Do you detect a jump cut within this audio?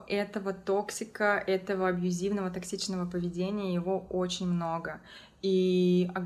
no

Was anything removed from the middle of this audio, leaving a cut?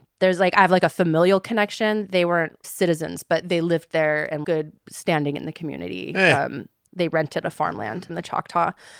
yes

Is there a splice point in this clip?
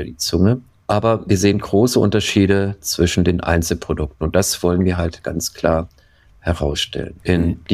no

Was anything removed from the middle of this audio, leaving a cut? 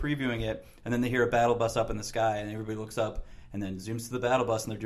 no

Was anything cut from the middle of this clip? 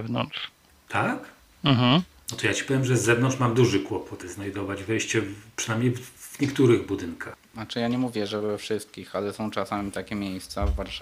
no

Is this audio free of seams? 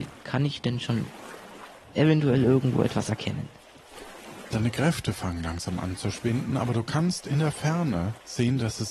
yes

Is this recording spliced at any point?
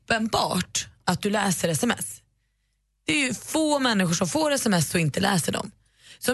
no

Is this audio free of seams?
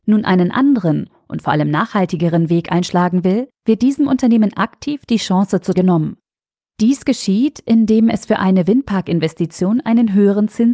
no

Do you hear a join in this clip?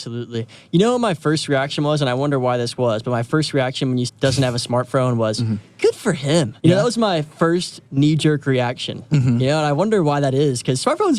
yes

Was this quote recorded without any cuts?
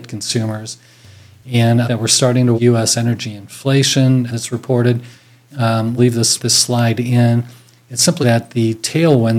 no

